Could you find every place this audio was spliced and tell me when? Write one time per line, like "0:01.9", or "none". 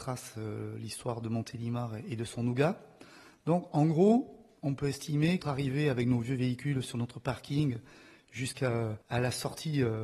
0:03.7
0:04.6
0:05.4
0:09.0